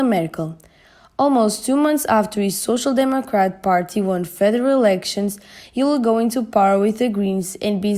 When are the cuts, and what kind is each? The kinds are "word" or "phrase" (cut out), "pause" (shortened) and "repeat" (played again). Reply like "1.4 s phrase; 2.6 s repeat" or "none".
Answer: none